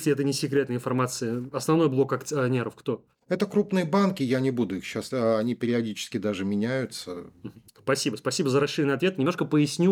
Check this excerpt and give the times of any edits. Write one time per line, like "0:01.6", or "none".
0:05.1
0:07.7